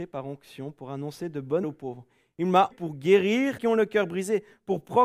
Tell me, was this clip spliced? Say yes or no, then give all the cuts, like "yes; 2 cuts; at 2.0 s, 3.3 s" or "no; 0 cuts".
yes; 3 cuts; at 1.6 s, 2.7 s, 3.6 s